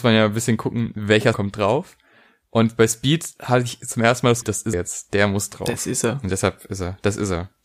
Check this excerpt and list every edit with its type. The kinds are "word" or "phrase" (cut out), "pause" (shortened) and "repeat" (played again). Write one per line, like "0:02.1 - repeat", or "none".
0:01.3 - word
0:04.4 - word
0:04.7 - word